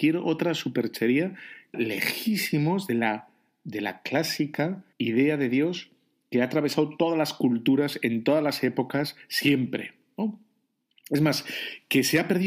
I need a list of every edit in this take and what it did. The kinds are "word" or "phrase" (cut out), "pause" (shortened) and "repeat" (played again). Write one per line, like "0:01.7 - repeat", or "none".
0:01.7 - phrase
0:04.9 - pause